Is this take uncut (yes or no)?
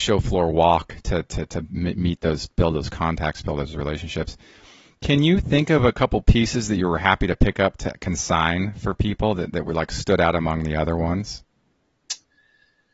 yes